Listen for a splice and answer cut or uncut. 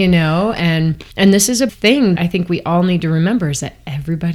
cut